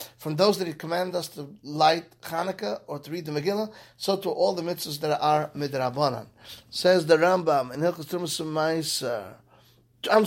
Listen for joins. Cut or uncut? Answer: uncut